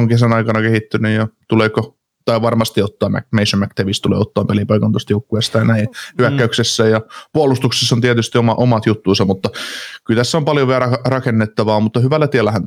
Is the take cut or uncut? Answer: uncut